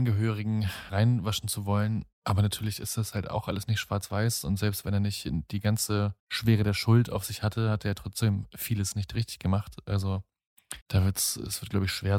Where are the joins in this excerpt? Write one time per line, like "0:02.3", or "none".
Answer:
0:02.1
0:06.2
0:10.8